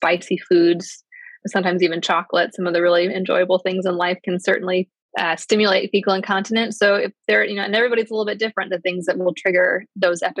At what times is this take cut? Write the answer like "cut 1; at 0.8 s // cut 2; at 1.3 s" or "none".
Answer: cut 1; at 1.4 s